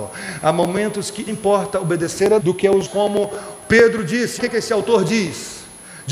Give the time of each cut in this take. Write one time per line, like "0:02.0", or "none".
0:01.3
0:02.4
0:02.9
0:04.4